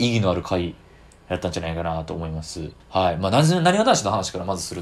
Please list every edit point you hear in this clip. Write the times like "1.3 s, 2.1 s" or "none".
2.8 s